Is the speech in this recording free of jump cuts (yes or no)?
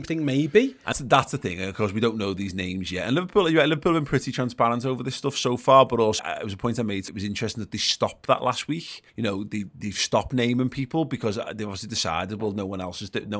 no